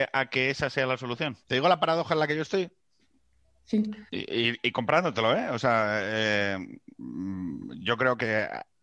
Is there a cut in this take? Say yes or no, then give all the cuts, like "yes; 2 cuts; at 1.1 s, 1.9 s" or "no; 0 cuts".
yes; 2 cuts; at 1.4 s, 4.1 s